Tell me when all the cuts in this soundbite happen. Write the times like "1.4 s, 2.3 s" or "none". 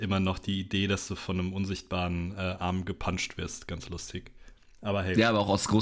none

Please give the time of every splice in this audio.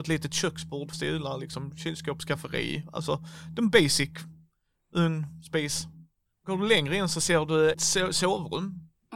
0.9 s, 7.7 s

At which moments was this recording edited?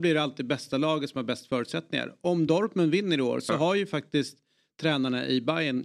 none

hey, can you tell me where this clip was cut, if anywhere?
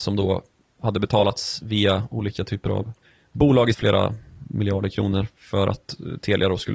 3.1 s, 3.7 s

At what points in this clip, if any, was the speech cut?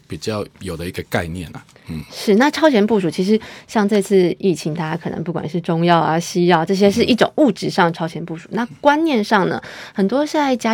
none

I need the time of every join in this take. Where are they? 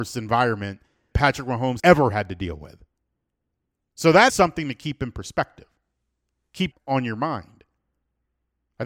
1.1 s, 1.8 s, 4.3 s, 6.7 s

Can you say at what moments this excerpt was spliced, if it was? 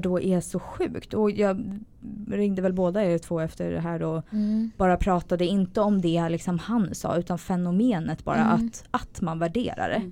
none

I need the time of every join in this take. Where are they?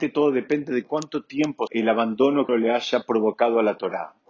1.7 s, 2.5 s

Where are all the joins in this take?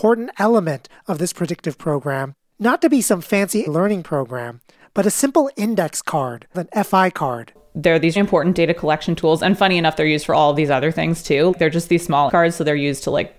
3.7 s, 6.5 s, 8.2 s, 11.5 s, 12.3 s

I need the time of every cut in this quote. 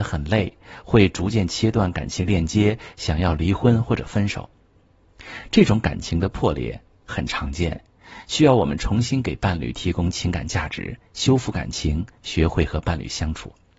none

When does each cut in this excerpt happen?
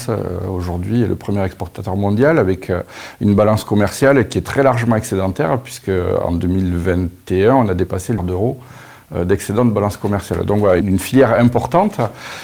8.2 s, 10.8 s

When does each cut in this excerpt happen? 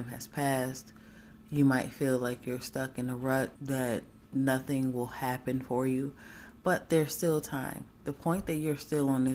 3.6 s

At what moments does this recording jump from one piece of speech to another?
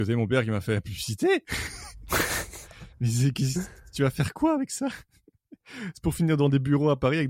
none

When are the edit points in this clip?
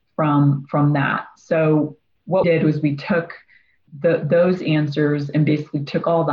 2.4 s, 3.9 s

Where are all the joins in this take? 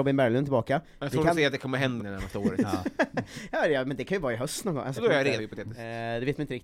2.0 s, 5.0 s, 5.4 s

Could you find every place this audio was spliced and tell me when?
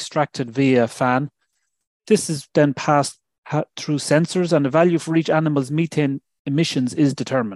none

